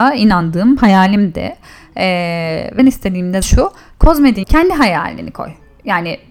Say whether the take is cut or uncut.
cut